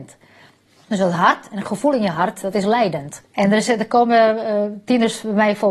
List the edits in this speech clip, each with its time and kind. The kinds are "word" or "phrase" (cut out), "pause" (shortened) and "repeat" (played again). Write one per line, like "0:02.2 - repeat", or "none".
0:03.2 - pause